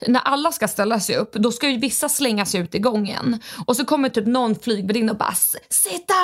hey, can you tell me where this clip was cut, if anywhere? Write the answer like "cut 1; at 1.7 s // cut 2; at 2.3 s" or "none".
none

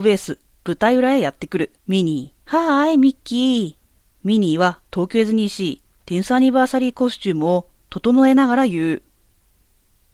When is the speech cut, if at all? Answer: cut 1; at 1.8 s // cut 2; at 2.4 s // cut 3; at 4.0 s // cut 4; at 4.9 s

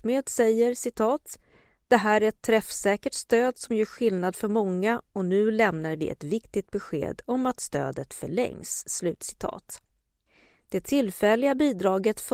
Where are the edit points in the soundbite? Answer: none

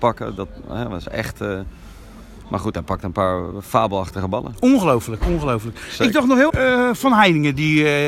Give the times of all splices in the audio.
cut 1; at 1.0 s // cut 2; at 6.5 s

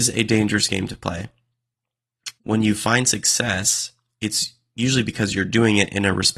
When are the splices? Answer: cut 1; at 2.4 s

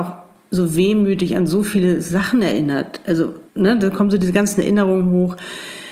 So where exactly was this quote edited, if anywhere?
cut 1; at 3.5 s

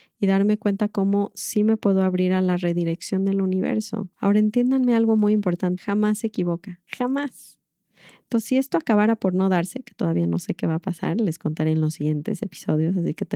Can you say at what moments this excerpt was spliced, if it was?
cut 1; at 4.1 s // cut 2; at 5.8 s // cut 3; at 6.9 s

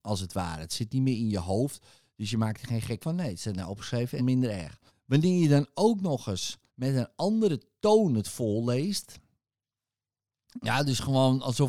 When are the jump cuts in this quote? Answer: cut 1; at 3.0 s // cut 2; at 4.2 s // cut 3; at 4.9 s // cut 4; at 6.7 s

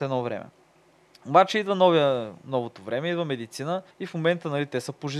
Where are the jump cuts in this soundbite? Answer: cut 1; at 3.9 s

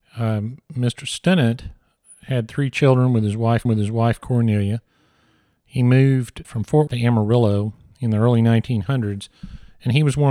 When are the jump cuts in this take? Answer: cut 1; at 3.7 s // cut 2; at 6.4 s // cut 3; at 6.9 s

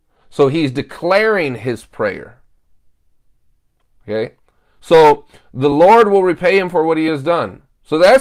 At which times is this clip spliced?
none

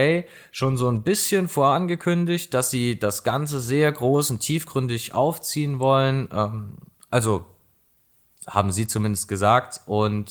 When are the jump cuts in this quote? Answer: none

